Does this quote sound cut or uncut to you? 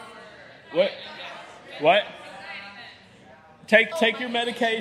cut